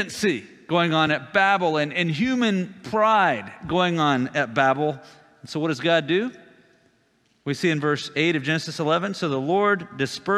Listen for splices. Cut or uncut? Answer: uncut